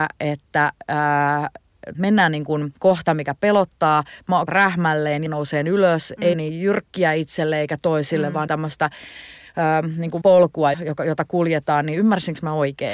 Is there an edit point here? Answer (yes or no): yes